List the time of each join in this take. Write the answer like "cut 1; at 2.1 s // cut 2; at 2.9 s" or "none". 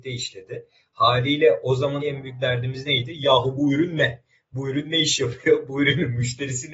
cut 1; at 2.0 s